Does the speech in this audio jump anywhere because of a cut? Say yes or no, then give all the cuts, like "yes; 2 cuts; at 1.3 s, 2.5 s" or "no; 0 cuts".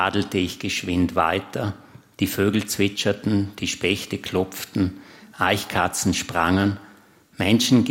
no; 0 cuts